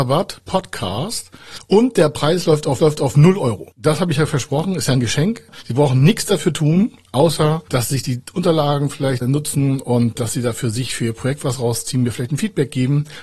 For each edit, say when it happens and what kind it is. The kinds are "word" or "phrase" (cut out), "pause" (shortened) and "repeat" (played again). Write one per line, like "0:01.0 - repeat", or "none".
0:02.8 - repeat
0:03.7 - pause
0:09.2 - word
0:10.2 - word